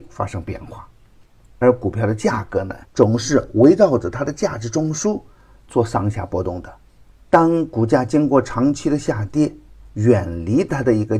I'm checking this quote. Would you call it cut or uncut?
cut